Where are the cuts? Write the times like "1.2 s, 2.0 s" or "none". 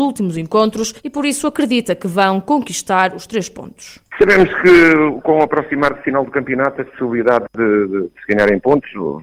1.0 s, 4.1 s